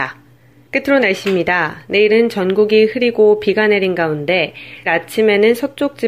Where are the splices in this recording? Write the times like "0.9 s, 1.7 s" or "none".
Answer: 4.8 s